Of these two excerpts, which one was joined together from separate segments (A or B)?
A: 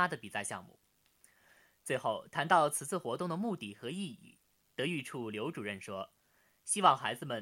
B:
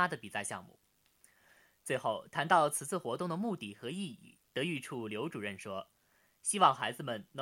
B